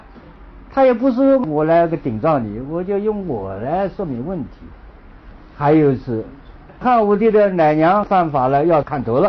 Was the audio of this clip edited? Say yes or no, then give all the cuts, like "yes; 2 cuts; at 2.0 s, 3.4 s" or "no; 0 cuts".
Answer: no; 0 cuts